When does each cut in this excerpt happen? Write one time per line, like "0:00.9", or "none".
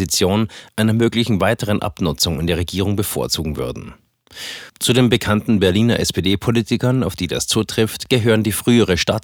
none